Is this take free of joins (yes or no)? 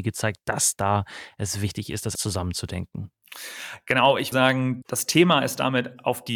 no